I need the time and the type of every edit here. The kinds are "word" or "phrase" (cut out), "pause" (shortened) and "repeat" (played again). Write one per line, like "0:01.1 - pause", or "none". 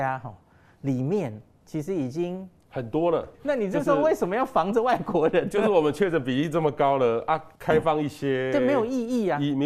0:03.3 - word
0:07.6 - pause